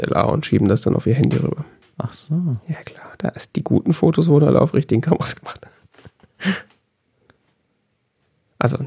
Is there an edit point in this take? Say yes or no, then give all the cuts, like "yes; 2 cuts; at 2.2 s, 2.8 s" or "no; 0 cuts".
no; 0 cuts